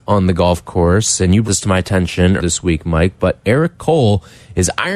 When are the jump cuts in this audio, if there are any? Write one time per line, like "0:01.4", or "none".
0:01.4
0:02.4